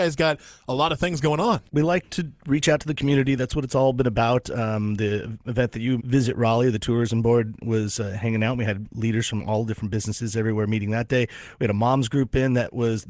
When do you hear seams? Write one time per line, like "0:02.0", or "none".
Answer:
0:01.7
0:06.0